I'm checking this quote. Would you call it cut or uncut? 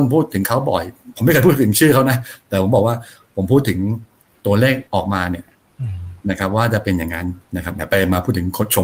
cut